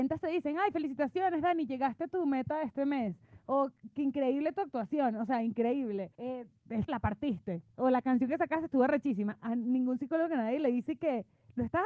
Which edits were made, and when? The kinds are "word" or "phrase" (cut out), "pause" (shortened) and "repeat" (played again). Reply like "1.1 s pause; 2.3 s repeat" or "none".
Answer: 6.1 s pause; 6.9 s word